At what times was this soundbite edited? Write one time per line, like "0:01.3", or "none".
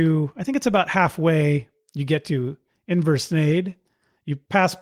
none

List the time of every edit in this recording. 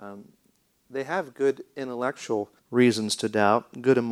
0:02.6

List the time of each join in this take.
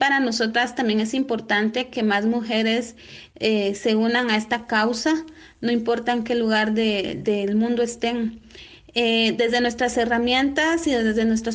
none

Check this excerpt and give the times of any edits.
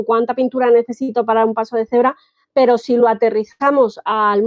none

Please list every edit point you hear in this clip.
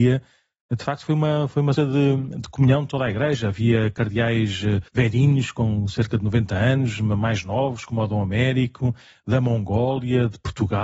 0:01.8
0:04.9

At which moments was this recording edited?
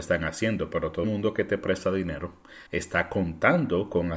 0:01.0
0:02.7

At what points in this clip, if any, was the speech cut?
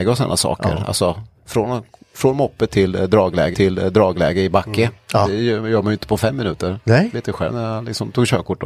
0:03.5

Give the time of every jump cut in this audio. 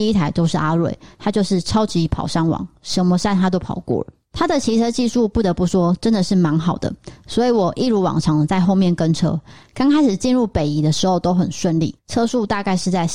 0:12.0

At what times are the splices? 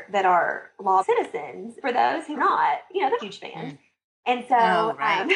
0:01.0
0:01.8
0:02.4
0:03.2

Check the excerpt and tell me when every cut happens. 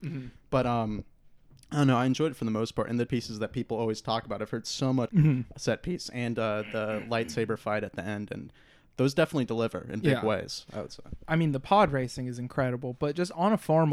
0:03.1
0:05.1

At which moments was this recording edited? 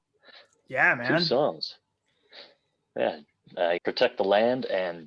0:03.8

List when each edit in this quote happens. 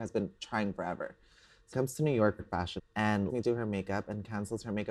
0:01.7
0:02.4
0:02.8
0:03.3

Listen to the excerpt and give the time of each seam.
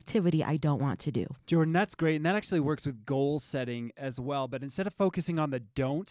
0:01.4

